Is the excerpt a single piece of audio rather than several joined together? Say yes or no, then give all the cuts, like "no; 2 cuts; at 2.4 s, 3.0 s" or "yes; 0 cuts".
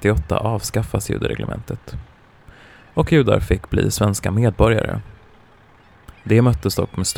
yes; 0 cuts